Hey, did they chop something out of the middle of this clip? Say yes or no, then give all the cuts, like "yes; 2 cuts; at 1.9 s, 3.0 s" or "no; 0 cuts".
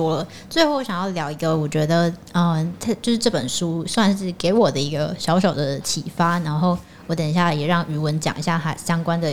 no; 0 cuts